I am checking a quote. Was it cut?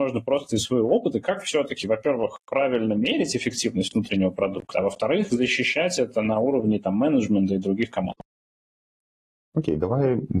no; 0 cuts

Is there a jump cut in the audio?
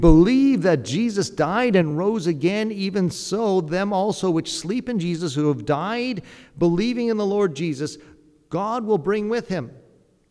no; 0 cuts

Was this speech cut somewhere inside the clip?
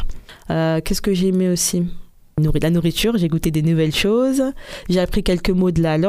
no; 0 cuts

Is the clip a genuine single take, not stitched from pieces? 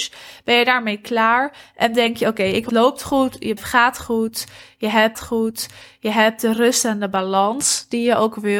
no; 3 cuts; at 2.7 s, 3.6 s, 5.1 s

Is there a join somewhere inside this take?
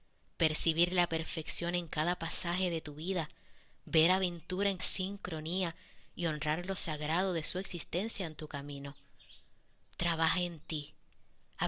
yes; 1 cut; at 4.8 s

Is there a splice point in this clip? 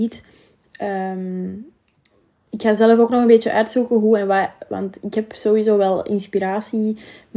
no; 0 cuts

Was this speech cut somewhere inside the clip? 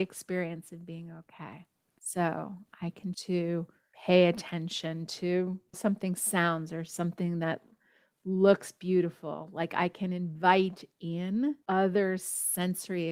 yes; 3 cuts; at 3.1 s, 5.7 s, 11.6 s

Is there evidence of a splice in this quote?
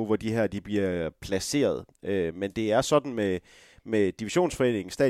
no; 0 cuts

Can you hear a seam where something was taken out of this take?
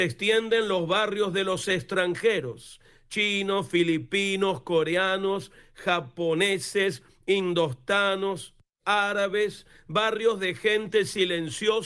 no; 0 cuts

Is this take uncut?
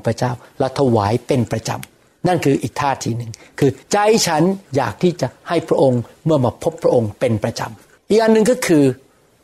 no; 2 cuts; at 3.8 s, 4.7 s

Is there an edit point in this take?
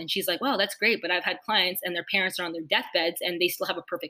no; 0 cuts

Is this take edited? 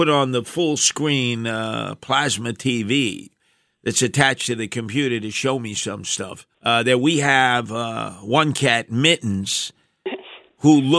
yes; 1 cut; at 6.5 s

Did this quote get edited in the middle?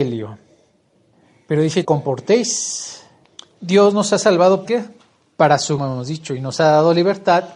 yes; 4 cuts; at 1.8 s, 3.2 s, 4.6 s, 5.8 s

